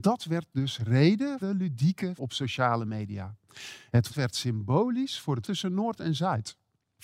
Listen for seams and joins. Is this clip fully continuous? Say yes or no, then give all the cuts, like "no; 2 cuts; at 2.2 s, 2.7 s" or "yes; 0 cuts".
no; 4 cuts; at 1.4 s, 2.2 s, 4.1 s, 5.4 s